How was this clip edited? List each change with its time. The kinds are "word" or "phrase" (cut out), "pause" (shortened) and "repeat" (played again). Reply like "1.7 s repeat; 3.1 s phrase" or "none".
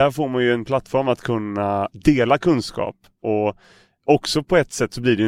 none